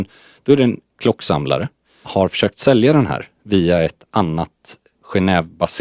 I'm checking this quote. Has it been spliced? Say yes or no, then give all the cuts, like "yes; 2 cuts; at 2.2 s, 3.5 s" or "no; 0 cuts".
yes; 2 cuts; at 0.9 s, 2.0 s